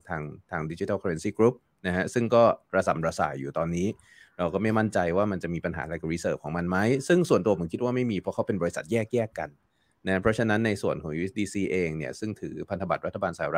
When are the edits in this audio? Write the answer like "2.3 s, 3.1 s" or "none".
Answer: none